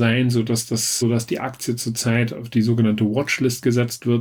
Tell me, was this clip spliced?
yes; 1 cut; at 1.0 s

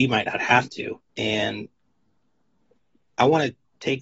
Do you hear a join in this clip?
yes; 1 cut; at 1.1 s

